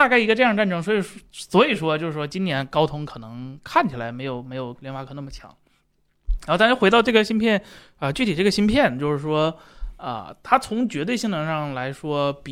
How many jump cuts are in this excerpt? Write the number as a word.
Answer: zero